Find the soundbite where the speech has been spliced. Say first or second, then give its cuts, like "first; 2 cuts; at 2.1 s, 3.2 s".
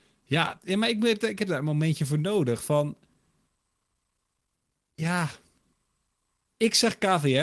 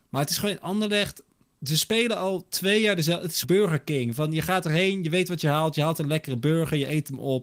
second; 1 cut; at 3.4 s